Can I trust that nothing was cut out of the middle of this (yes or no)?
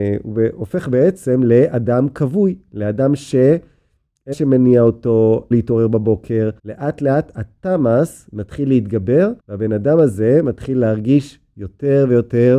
no